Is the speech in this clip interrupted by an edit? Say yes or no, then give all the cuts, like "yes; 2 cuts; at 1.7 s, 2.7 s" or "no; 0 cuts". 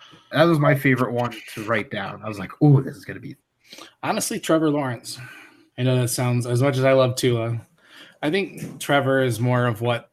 no; 0 cuts